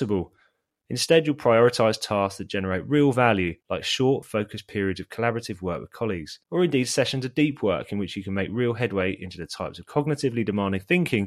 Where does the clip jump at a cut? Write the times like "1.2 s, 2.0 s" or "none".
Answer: 3.6 s, 6.4 s